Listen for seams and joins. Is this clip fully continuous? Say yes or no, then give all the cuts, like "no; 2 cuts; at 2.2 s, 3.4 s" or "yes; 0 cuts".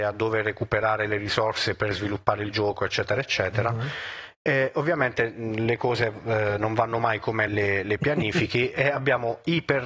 no; 1 cut; at 7.5 s